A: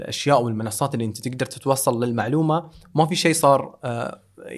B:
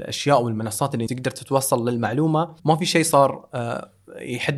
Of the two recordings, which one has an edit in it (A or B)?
B